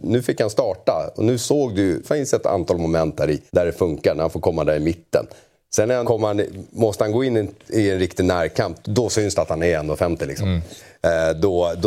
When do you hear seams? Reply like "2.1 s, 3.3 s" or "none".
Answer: 2.0 s, 3.5 s, 6.0 s, 8.8 s